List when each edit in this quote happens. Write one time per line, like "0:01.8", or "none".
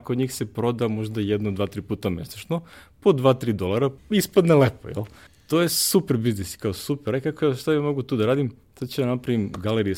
0:04.0
0:05.3